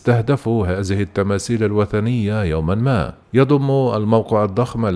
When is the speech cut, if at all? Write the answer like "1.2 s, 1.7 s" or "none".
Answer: 3.2 s